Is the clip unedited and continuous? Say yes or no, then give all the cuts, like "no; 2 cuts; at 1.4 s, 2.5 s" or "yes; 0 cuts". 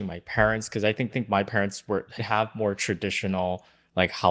no; 2 cuts; at 1.1 s, 2.2 s